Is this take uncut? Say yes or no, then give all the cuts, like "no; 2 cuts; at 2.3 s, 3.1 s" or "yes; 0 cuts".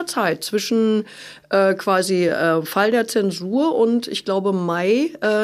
yes; 0 cuts